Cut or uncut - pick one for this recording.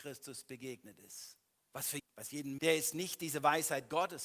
cut